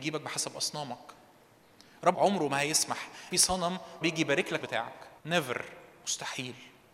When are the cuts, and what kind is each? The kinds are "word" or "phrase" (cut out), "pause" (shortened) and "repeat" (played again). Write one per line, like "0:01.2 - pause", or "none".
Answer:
0:02.1 - word
0:03.3 - phrase
0:04.0 - word
0:04.6 - word
0:05.2 - pause